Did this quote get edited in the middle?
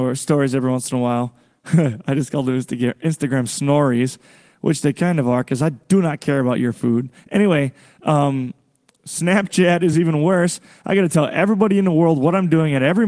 no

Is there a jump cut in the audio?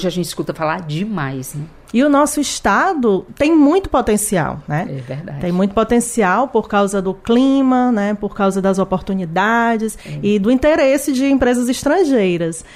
no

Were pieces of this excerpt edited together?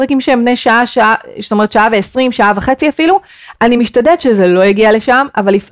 no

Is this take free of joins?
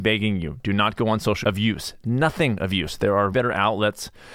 no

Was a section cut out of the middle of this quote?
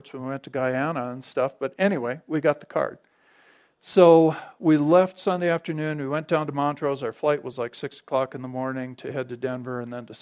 no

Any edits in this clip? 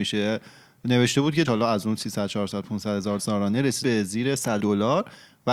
yes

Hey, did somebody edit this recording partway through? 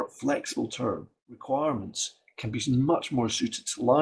no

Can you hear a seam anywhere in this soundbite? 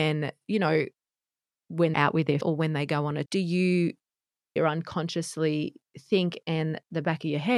yes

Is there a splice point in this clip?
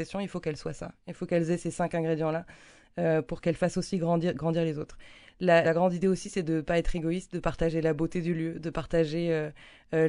yes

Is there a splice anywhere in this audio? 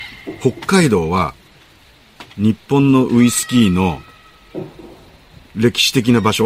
no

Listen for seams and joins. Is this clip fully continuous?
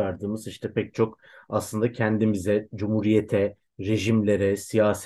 yes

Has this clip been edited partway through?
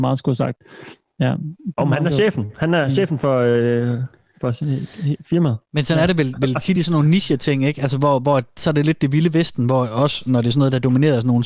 no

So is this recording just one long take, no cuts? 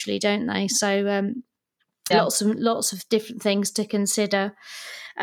no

